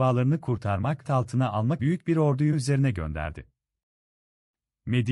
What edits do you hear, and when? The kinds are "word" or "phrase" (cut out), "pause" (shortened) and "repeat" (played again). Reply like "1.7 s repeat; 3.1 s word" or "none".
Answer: 1.0 s phrase; 1.8 s word; 2.5 s word